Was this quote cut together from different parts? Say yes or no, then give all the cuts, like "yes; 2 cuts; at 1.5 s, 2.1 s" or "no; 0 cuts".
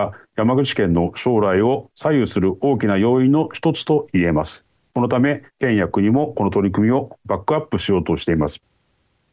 yes; 2 cuts; at 4.7 s, 5.5 s